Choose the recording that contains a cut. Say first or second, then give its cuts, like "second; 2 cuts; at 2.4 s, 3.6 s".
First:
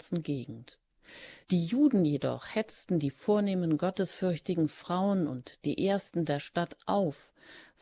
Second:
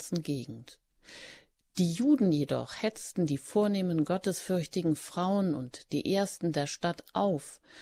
first; 1 cut; at 1.4 s